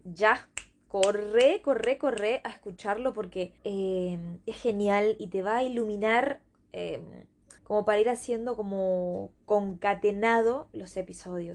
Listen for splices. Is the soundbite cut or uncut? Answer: cut